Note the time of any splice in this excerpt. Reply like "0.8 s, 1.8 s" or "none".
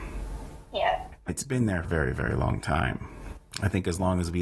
1.3 s, 1.8 s